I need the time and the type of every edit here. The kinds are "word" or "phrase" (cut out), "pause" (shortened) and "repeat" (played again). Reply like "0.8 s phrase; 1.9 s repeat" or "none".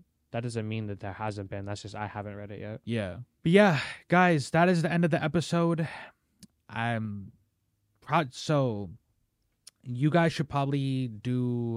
3.3 s pause

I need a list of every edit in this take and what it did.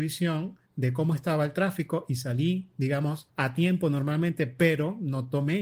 3.3 s pause

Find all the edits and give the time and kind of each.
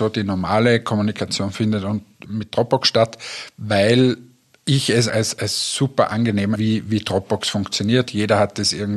2.2 s word; 5.1 s word; 6.5 s word

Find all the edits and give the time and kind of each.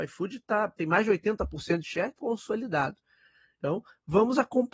1.8 s word; 2.2 s word

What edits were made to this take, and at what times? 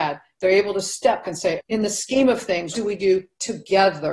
1.2 s word; 1.6 s word; 2.7 s word

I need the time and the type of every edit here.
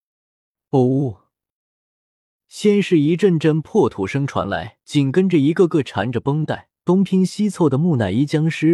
4.8 s pause; 6.8 s pause

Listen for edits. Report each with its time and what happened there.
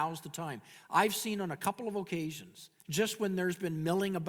2.8 s pause

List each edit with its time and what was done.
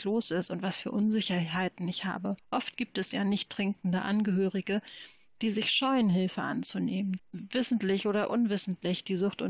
2.4 s pause; 7.2 s word

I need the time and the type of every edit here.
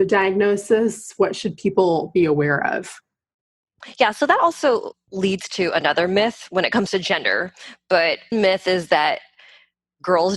8.3 s word

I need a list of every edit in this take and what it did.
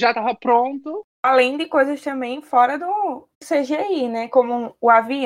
3.3 s pause

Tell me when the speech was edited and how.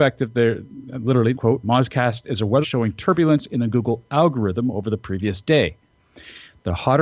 1.3 s phrase; 2.6 s word

